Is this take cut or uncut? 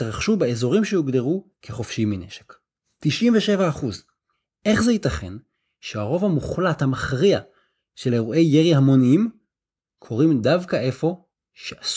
uncut